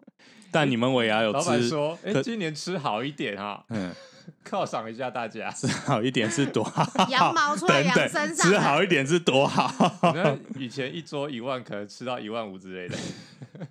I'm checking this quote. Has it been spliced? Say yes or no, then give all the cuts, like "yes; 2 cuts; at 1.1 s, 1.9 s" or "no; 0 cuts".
no; 0 cuts